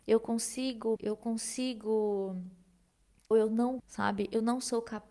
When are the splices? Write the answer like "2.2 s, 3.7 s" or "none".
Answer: 1.0 s, 3.3 s, 3.8 s